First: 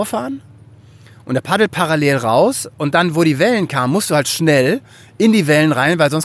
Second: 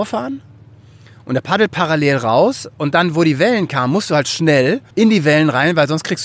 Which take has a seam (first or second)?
second